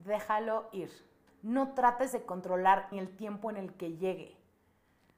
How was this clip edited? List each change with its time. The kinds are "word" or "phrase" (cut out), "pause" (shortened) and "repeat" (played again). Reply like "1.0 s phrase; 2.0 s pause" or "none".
1.3 s pause; 2.9 s phrase